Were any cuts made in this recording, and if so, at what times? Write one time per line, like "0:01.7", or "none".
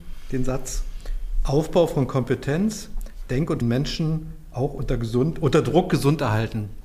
0:03.6